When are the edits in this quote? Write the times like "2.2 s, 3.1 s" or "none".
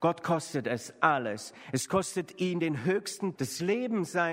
3.4 s